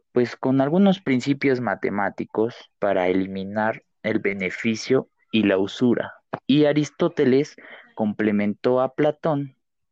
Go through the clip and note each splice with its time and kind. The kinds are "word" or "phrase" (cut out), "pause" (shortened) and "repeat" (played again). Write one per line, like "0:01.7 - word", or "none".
0:02.7 - pause
0:03.9 - pause
0:06.4 - pause